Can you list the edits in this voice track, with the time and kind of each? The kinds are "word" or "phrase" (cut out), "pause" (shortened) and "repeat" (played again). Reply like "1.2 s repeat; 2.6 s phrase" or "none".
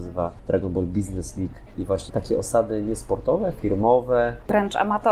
2.1 s word